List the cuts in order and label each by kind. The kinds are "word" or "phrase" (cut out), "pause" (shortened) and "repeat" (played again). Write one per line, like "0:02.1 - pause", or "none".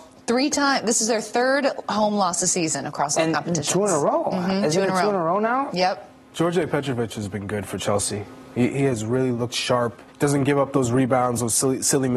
0:10.1 - pause